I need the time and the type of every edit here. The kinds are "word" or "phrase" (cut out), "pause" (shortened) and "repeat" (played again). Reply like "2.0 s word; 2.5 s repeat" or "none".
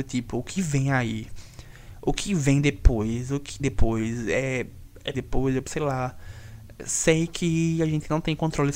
3.6 s word; 5.1 s phrase; 5.6 s word